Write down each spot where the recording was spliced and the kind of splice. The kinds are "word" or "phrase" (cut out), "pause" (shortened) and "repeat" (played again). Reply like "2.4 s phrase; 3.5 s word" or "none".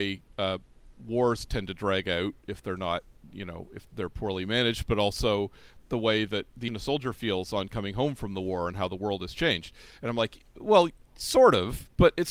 3.9 s word; 5.8 s word; 6.7 s word